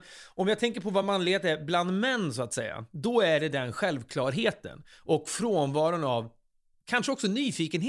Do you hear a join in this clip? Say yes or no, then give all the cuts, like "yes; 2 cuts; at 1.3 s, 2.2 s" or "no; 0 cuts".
no; 0 cuts